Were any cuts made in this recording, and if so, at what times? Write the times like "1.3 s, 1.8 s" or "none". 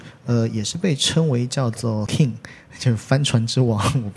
2.1 s